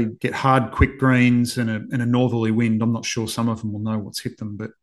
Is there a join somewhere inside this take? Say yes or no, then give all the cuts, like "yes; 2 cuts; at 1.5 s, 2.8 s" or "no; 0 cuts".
no; 0 cuts